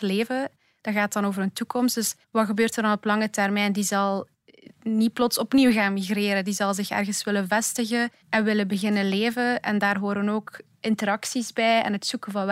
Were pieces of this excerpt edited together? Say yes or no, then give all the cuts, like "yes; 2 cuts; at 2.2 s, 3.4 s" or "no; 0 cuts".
yes; 2 cuts; at 2.2 s, 8.2 s